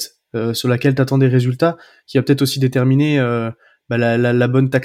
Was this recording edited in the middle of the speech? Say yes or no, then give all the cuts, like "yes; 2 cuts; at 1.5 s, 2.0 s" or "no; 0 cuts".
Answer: no; 0 cuts